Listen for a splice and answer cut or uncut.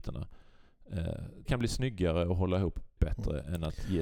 cut